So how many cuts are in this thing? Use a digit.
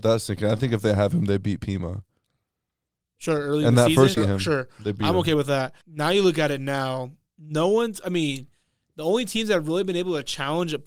2